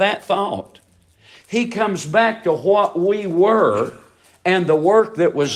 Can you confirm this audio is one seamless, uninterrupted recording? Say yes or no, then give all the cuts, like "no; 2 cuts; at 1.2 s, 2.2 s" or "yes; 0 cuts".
yes; 0 cuts